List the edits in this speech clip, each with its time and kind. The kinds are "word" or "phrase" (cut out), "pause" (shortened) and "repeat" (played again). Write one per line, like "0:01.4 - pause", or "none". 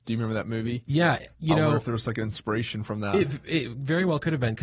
0:01.3 - pause